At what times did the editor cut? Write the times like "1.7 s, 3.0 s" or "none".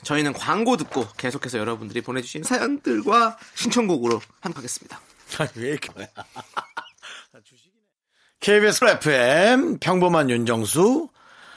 2.4 s, 4.6 s, 5.9 s, 8.8 s